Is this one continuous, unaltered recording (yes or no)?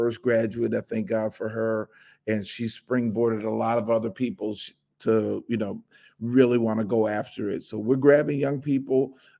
yes